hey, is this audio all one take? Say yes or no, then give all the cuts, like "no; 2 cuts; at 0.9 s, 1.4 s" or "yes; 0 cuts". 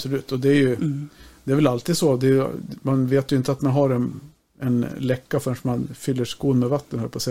yes; 0 cuts